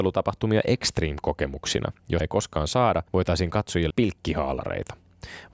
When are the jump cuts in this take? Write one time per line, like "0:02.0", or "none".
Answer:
0:02.2
0:03.1
0:03.9